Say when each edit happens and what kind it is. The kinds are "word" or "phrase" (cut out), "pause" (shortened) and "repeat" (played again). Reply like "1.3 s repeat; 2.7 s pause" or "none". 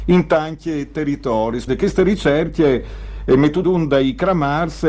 1.7 s word; 3.6 s word